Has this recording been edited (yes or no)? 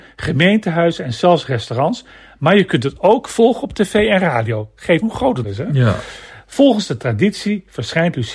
yes